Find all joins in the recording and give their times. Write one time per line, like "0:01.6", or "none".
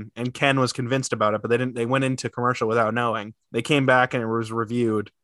0:03.4